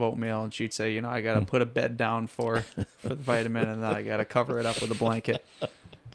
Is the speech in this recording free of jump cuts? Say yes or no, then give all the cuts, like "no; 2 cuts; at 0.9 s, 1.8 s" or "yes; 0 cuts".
yes; 0 cuts